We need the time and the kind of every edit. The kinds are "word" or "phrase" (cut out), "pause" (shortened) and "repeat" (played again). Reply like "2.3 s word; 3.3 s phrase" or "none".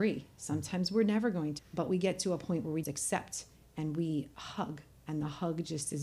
1.6 s word; 2.8 s word